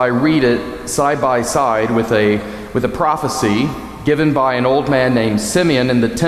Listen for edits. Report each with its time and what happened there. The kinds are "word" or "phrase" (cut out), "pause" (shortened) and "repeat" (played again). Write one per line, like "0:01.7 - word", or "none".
none